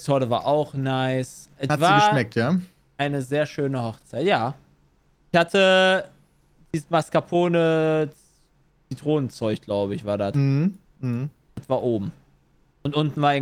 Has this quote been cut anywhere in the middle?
no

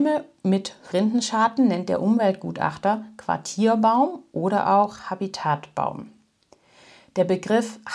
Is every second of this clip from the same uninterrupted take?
no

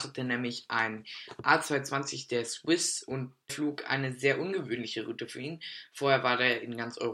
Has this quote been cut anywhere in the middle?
yes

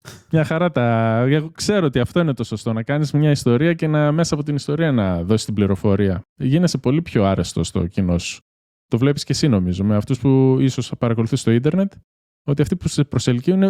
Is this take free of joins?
yes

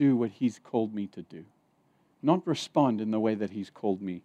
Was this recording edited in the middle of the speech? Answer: no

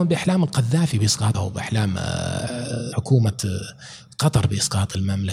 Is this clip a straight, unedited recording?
no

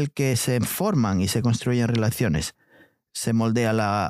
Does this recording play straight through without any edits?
yes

